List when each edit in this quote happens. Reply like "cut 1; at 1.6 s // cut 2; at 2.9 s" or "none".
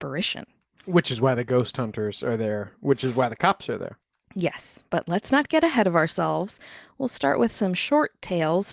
none